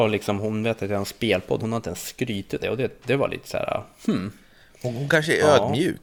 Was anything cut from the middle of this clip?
yes; 2 cuts; at 1.6 s, 2.6 s

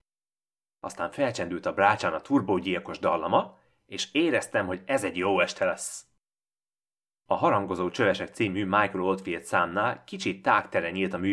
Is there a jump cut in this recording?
no; 0 cuts

